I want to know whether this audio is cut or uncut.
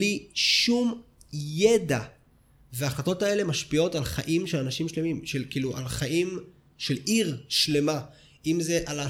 uncut